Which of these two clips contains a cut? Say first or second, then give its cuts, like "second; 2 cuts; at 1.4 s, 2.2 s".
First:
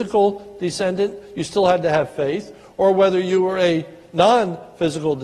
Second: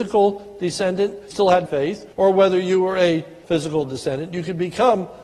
second; 4 cuts; at 1.3 s, 1.7 s, 2.1 s, 3.4 s